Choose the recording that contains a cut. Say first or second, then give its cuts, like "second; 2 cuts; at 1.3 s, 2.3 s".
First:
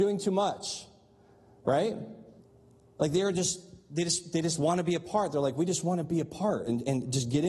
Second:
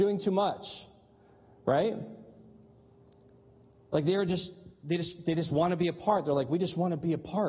first; 1 cut; at 2.4 s